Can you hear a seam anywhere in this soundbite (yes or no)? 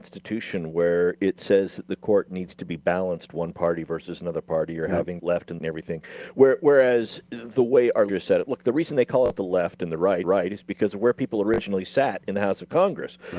yes